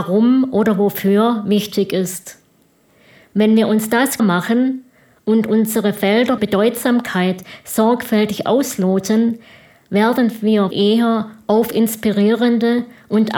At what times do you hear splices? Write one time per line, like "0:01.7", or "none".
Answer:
0:04.2
0:06.4
0:10.7